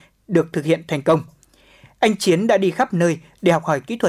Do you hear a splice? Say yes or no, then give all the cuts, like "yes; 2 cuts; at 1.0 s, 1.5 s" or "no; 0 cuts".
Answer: no; 0 cuts